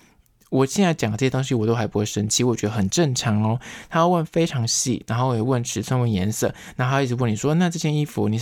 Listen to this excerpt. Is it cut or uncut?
uncut